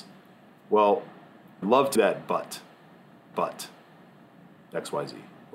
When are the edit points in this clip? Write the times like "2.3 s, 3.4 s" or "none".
1.6 s, 1.9 s, 3.3 s